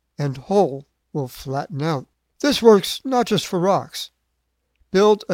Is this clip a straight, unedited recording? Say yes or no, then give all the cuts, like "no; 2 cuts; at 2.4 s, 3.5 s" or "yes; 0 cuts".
no; 2 cuts; at 1.0 s, 2.1 s